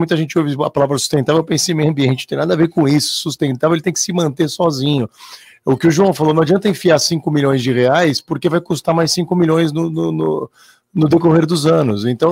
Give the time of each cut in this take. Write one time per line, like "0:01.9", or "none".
none